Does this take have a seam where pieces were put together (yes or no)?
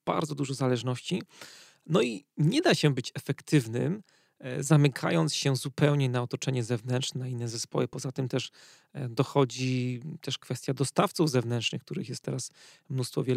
no